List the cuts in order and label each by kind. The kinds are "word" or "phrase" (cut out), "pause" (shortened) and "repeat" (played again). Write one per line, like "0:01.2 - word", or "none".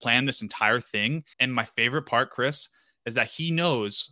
0:01.3 - pause